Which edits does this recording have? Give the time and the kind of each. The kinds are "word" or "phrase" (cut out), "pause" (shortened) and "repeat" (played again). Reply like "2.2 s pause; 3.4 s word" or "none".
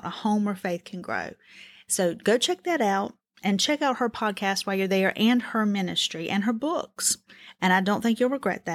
none